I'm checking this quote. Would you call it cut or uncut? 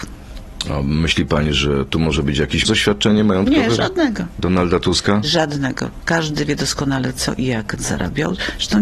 cut